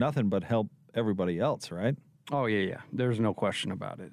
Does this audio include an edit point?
no; 0 cuts

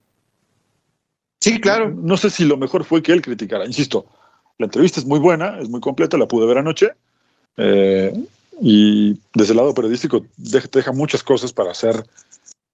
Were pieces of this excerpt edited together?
no; 0 cuts

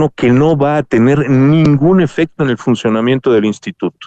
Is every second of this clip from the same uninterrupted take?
yes; 0 cuts

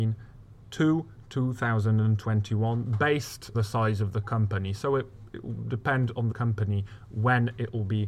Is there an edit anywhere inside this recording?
yes; 2 cuts; at 3.5 s, 6.3 s

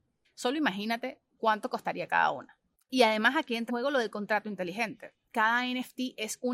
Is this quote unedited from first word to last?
no; 1 cut; at 3.7 s

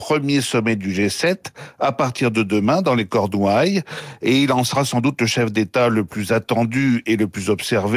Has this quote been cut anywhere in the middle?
no; 0 cuts

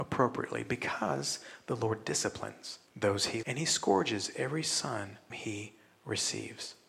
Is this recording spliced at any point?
yes; 3 cuts; at 2.9 s, 3.4 s, 5.3 s

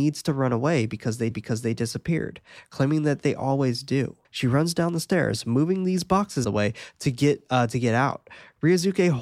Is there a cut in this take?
yes; 3 cuts; at 1.3 s, 4.2 s, 6.4 s

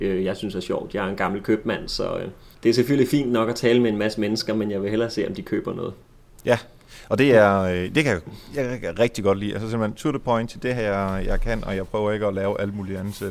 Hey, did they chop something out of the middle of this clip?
no; 0 cuts

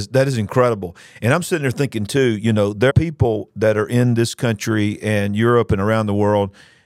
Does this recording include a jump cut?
yes; 1 cut; at 2.9 s

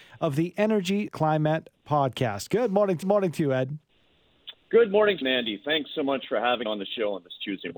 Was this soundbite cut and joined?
yes; 4 cuts; at 1.1 s, 3.0 s, 5.2 s, 6.7 s

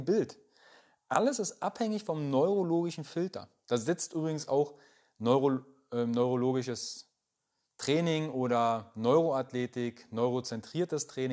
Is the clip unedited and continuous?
yes; 0 cuts

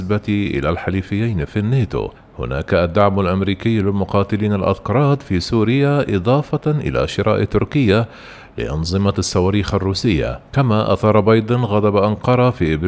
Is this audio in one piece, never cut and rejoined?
no; 2 cuts; at 2.2 s, 10.5 s

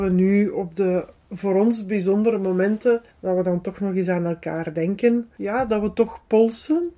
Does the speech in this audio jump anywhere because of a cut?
yes; 2 cuts; at 3.1 s, 5.3 s

